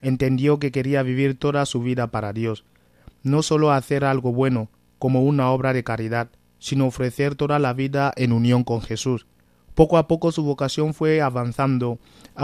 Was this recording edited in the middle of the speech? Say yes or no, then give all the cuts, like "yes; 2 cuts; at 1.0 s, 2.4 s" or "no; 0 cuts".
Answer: no; 0 cuts